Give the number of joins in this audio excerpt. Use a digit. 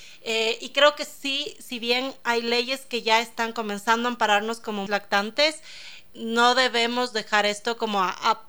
2